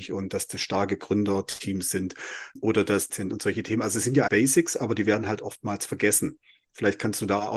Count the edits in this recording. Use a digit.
2